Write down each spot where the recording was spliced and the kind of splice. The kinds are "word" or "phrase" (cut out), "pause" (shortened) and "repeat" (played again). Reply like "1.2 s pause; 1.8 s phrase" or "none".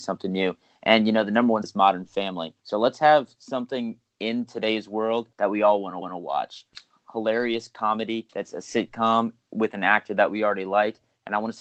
1.6 s word; 2.6 s pause; 5.3 s pause; 6.0 s repeat; 8.3 s pause